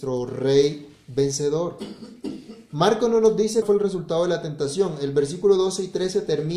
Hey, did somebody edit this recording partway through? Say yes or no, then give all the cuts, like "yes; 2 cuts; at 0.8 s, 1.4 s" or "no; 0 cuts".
yes; 1 cut; at 3.6 s